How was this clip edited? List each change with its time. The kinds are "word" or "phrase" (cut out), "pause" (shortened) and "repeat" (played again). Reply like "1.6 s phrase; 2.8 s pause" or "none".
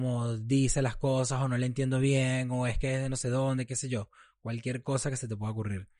none